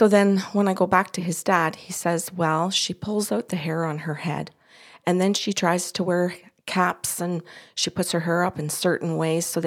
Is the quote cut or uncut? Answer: uncut